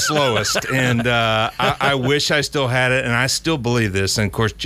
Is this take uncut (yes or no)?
yes